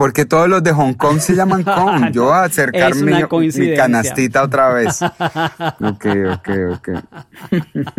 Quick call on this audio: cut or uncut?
uncut